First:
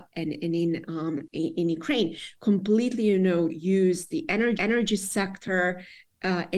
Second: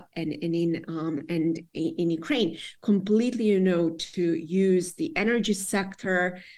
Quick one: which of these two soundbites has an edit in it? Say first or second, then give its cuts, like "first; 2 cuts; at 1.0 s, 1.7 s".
first; 3 cuts; at 1.3 s, 3.5 s, 4.6 s